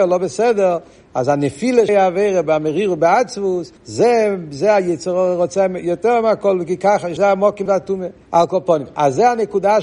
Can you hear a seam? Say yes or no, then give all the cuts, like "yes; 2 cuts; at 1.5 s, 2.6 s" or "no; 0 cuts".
yes; 5 cuts; at 1.9 s, 3.8 s, 7.2 s, 7.7 s, 8.2 s